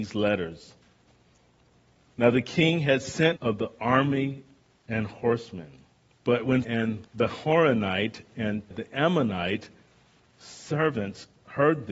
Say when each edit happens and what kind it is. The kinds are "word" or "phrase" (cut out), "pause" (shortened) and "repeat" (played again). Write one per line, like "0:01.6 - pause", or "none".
0:03.4 - phrase
0:04.7 - pause
0:06.0 - pause
0:06.6 - word
0:07.1 - pause
0:08.7 - word